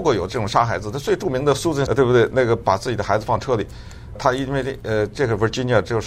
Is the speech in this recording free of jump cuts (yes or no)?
no